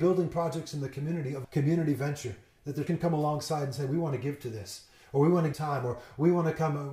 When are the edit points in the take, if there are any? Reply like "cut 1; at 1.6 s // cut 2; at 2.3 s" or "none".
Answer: cut 1; at 1.4 s // cut 2; at 2.9 s // cut 3; at 5.5 s